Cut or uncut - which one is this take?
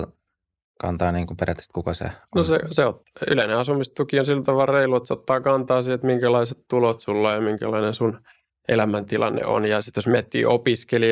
uncut